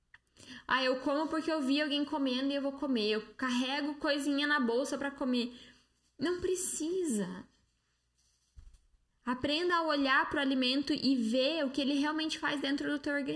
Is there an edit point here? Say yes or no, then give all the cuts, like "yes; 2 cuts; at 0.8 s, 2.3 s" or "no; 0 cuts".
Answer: no; 0 cuts